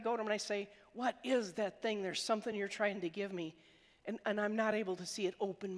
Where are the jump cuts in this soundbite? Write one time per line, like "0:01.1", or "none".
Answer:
none